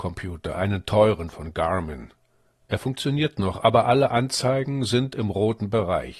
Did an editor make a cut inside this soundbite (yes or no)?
no